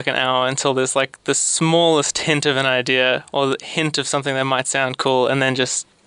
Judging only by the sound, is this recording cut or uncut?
uncut